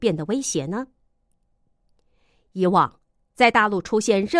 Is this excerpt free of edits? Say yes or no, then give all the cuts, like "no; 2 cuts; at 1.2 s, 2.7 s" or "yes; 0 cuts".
yes; 0 cuts